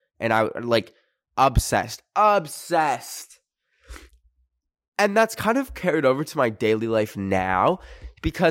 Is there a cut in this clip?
no; 0 cuts

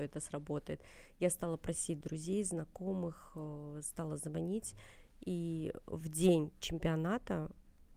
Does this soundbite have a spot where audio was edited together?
no; 0 cuts

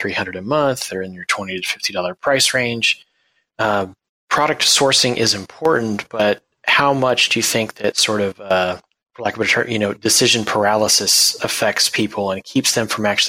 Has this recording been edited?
no; 0 cuts

